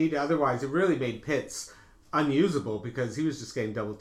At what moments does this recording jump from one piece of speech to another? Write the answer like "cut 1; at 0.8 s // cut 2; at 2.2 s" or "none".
none